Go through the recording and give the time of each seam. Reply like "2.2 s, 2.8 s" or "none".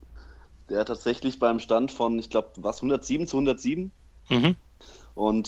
none